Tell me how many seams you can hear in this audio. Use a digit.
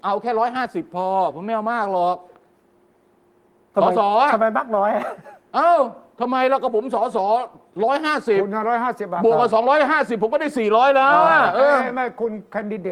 0